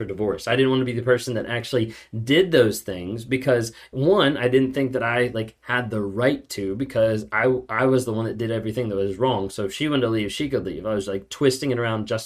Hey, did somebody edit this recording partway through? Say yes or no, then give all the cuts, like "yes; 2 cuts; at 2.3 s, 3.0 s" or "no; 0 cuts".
no; 0 cuts